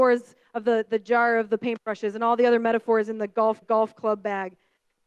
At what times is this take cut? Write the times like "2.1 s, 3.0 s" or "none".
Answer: 3.6 s